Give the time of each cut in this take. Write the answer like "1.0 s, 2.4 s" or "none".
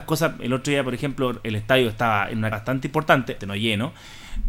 2.5 s, 3.4 s